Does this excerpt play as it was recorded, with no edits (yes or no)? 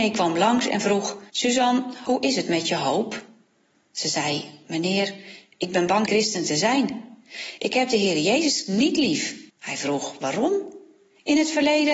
no